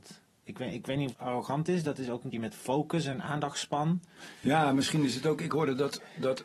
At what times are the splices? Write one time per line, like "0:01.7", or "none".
0:01.1
0:02.3